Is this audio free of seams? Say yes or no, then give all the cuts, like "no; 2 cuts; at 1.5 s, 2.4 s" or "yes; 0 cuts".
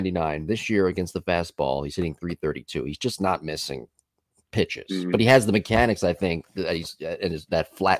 yes; 0 cuts